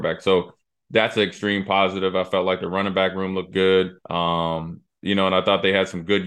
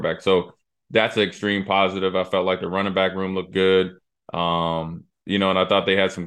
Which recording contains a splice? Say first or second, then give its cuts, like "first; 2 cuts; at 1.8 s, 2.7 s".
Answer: first; 1 cut; at 4.0 s